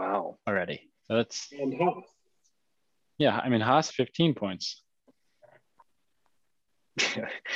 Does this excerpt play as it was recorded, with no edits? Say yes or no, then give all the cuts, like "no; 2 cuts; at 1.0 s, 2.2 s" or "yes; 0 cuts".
no; 1 cut; at 3.9 s